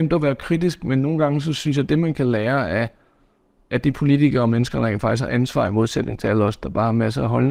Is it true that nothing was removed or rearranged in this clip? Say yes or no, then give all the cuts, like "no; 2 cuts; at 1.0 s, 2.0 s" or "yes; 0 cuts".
yes; 0 cuts